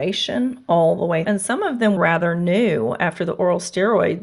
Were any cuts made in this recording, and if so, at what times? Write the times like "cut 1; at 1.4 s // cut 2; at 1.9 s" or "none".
cut 1; at 1.2 s // cut 2; at 2.0 s